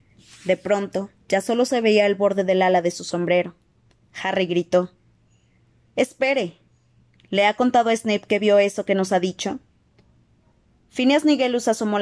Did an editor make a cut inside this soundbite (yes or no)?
no